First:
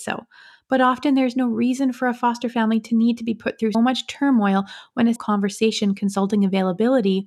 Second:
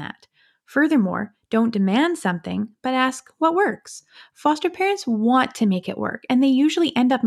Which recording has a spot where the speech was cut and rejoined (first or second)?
first